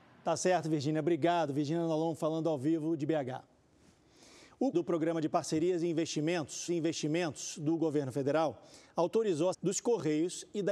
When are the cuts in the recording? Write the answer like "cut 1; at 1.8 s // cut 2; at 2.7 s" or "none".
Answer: cut 1; at 4.7 s // cut 2; at 6.7 s // cut 3; at 9.5 s